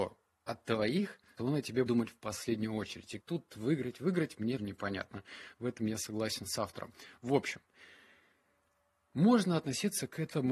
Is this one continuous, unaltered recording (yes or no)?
no